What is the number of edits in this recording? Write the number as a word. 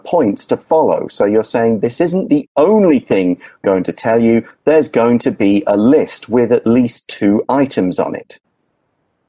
one